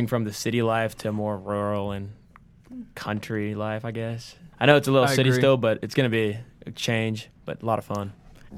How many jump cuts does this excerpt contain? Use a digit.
2